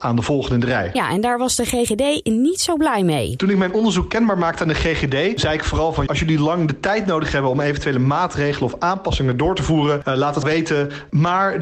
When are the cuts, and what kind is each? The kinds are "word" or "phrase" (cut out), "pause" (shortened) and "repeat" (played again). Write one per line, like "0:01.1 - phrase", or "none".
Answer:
0:06.1 - word
0:10.4 - word